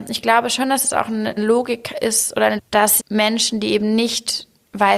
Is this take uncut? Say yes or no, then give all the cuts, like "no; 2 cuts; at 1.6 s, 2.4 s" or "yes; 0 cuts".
no; 3 cuts; at 1.4 s, 2.6 s, 3.0 s